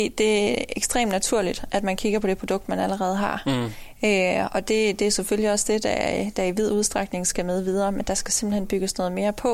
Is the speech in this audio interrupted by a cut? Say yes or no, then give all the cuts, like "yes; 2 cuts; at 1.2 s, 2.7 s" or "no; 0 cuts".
no; 0 cuts